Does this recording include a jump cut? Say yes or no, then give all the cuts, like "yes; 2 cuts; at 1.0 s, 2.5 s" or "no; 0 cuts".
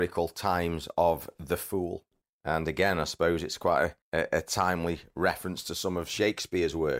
yes; 2 cuts; at 2.2 s, 4.0 s